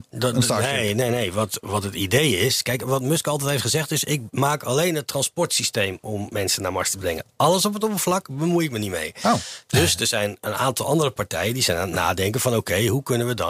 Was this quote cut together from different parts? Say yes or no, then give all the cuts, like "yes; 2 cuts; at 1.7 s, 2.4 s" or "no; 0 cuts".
no; 0 cuts